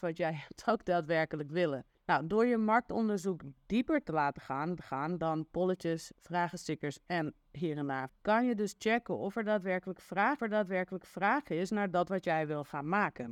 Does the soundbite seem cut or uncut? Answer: cut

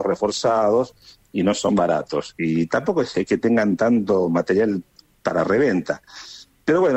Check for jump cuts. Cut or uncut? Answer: uncut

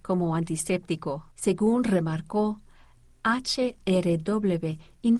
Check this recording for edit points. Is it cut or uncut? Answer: cut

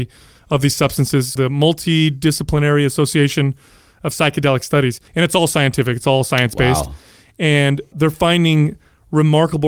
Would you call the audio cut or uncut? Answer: cut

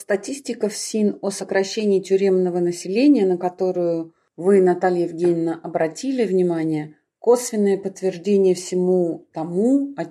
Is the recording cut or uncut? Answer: uncut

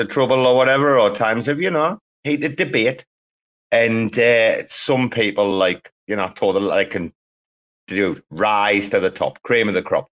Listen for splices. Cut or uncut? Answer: uncut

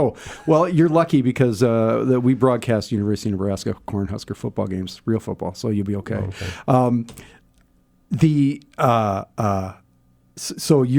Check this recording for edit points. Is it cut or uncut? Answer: uncut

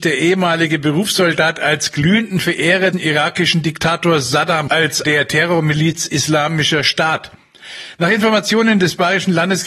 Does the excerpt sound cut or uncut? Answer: cut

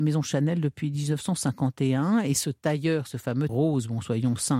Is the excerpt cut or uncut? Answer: cut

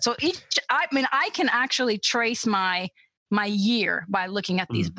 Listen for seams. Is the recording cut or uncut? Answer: uncut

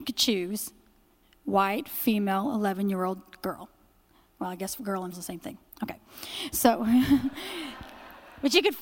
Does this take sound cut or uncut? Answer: cut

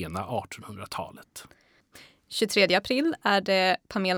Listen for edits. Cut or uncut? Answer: uncut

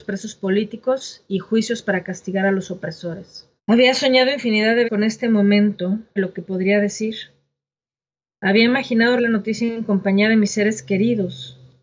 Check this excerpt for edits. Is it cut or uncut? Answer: cut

